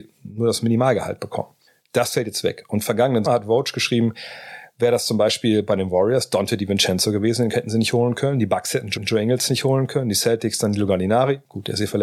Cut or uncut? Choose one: cut